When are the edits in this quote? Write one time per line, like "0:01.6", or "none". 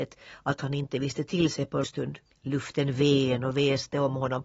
0:01.8
0:02.3